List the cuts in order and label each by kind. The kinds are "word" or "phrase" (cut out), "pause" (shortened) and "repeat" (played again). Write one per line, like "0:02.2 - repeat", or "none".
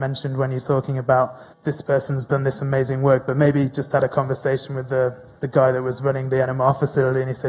0:01.5 - pause